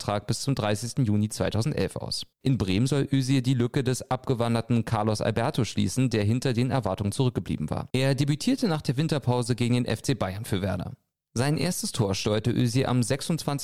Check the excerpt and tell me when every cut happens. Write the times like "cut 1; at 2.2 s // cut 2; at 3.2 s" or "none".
cut 1; at 2.3 s // cut 2; at 7.9 s

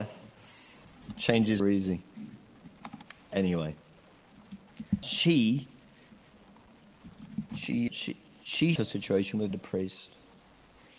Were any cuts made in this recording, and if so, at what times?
cut 1; at 1.6 s // cut 2; at 5.0 s // cut 3; at 7.9 s // cut 4; at 8.8 s // cut 5; at 9.5 s

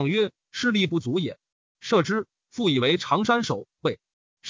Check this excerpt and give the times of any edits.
none

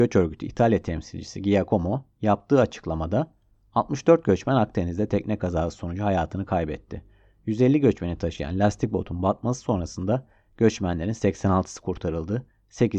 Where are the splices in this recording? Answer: none

